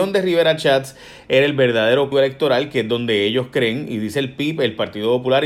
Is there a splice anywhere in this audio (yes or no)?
yes